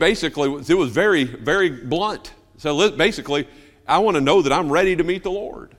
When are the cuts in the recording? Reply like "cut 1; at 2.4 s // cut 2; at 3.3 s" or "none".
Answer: none